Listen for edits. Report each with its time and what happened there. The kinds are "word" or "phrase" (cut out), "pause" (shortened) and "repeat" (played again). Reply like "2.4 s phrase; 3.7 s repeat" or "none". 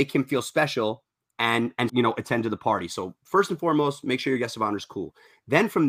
1.9 s word